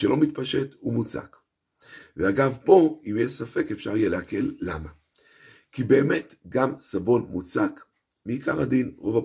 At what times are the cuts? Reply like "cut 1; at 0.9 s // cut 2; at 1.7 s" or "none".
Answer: none